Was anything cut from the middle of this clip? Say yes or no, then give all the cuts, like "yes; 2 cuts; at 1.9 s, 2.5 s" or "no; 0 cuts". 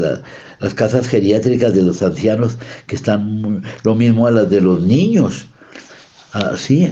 no; 0 cuts